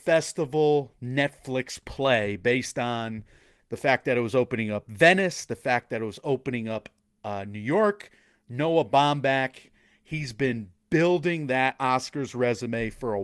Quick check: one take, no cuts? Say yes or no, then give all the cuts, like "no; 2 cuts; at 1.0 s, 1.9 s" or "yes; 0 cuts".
yes; 0 cuts